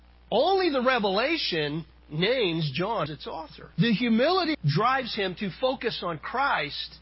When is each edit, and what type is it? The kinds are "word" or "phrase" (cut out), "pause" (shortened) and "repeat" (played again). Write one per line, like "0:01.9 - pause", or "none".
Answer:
0:03.1 - word
0:03.7 - pause
0:04.5 - phrase